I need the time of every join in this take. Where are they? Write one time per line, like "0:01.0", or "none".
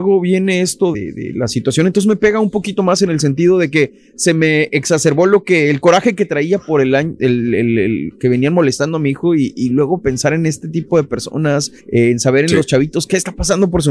0:00.9
0:11.8